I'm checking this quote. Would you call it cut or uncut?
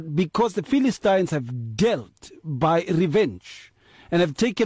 uncut